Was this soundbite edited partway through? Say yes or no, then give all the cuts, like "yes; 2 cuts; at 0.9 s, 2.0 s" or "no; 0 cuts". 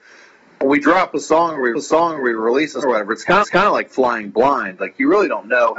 yes; 3 cuts; at 1.7 s, 2.8 s, 3.4 s